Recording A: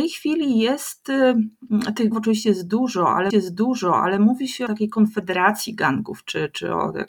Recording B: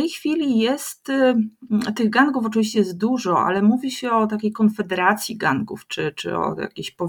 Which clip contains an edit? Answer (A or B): A